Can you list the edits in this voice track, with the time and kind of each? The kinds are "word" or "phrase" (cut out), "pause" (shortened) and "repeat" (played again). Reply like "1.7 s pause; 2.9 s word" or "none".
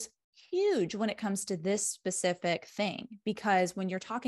none